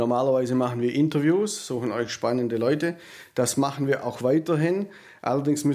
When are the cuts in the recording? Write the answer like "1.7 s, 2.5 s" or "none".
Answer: none